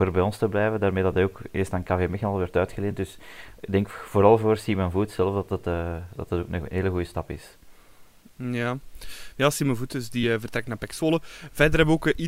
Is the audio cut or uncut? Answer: uncut